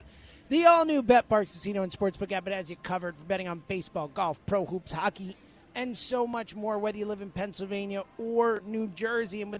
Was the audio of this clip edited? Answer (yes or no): no